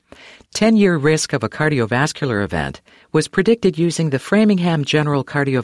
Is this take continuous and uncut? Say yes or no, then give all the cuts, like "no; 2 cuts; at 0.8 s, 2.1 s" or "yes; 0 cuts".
yes; 0 cuts